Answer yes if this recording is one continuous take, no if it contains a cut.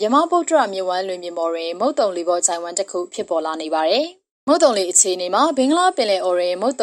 no